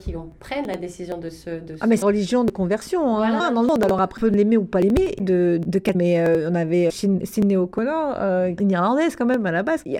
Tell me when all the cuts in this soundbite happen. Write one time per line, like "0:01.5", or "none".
0:02.0
0:03.4
0:04.2
0:05.2
0:05.9
0:06.9
0:08.6